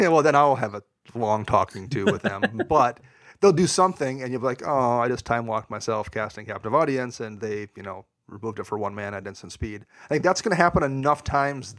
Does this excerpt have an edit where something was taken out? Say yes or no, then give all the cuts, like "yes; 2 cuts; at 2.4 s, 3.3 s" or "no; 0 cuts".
no; 0 cuts